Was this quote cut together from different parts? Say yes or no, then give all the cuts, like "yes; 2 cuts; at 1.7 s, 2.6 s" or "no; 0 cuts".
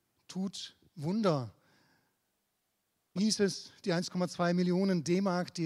yes; 1 cut; at 3.2 s